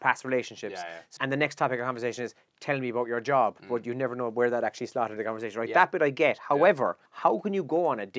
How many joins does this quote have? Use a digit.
3